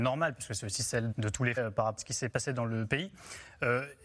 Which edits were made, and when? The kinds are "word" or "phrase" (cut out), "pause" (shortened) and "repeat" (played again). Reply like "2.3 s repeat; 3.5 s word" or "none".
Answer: 1.1 s word; 1.6 s word; 2.0 s word; 2.3 s word